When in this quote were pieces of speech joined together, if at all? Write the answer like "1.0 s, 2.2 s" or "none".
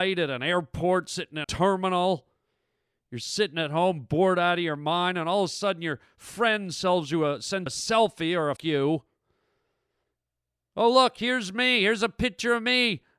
1.4 s, 7.7 s, 8.6 s